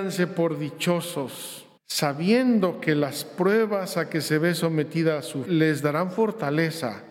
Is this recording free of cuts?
no; 2 cuts; at 1.8 s, 5.4 s

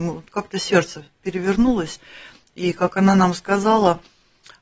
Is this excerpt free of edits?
yes; 0 cuts

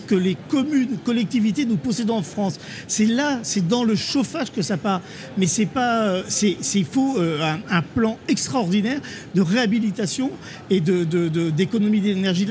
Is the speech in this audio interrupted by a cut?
no; 0 cuts

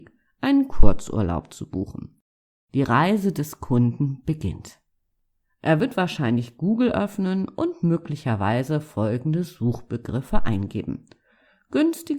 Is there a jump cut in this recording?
no; 0 cuts

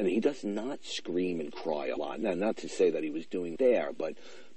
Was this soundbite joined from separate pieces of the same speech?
yes; 2 cuts; at 2.0 s, 3.6 s

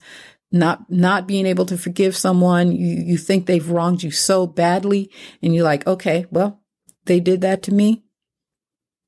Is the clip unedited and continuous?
yes; 0 cuts

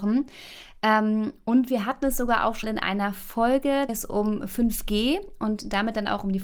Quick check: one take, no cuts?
no; 2 cuts; at 2.6 s, 3.9 s

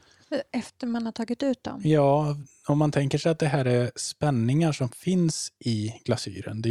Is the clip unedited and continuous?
yes; 0 cuts

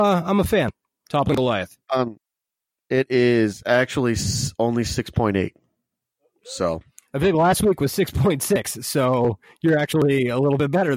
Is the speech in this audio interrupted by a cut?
yes; 1 cut; at 1.8 s

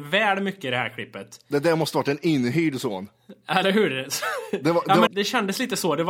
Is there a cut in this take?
yes; 1 cut; at 5.1 s

